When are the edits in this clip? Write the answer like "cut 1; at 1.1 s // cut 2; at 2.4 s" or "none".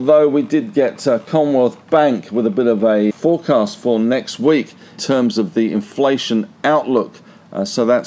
cut 1; at 3.1 s // cut 2; at 5.0 s